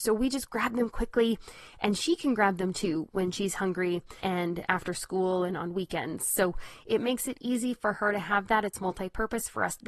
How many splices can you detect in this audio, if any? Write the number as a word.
one